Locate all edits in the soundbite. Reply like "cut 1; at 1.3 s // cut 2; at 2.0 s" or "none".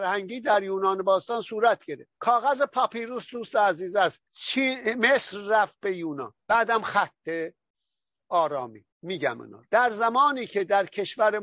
cut 1; at 2.2 s // cut 2; at 4.2 s // cut 3; at 6.4 s // cut 4; at 8.9 s // cut 5; at 9.7 s